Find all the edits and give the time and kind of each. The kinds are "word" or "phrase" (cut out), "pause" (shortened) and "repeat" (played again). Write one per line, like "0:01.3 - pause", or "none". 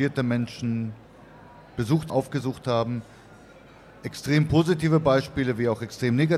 0:02.1 - word